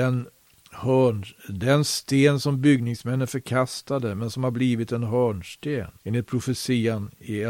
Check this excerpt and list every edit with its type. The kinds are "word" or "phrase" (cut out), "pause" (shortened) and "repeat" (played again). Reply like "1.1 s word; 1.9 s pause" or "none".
6.0 s pause